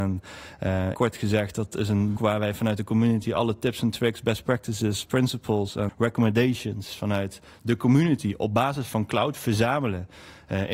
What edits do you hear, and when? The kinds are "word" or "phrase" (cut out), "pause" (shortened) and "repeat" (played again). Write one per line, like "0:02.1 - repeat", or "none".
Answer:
0:00.9 - word
0:02.2 - word
0:05.9 - word